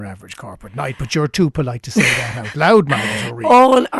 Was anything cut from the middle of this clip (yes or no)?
no